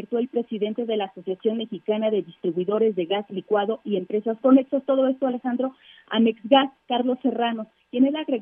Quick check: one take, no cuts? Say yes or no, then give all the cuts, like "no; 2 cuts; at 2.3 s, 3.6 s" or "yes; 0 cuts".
yes; 0 cuts